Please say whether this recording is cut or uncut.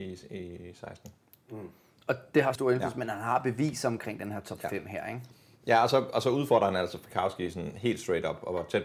cut